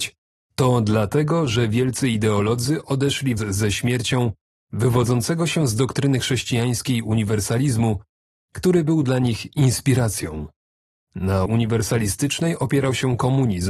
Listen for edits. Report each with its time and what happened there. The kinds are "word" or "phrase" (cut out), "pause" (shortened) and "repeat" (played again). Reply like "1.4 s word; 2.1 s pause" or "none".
3.4 s word; 11.5 s word